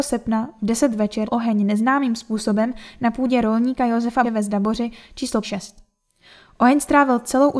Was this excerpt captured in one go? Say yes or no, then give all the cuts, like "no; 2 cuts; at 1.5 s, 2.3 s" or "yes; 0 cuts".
no; 3 cuts; at 1.3 s, 4.2 s, 5.4 s